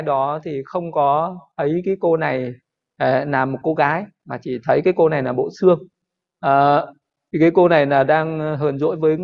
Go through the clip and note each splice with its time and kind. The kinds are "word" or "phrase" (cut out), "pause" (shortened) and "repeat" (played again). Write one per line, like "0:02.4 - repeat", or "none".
none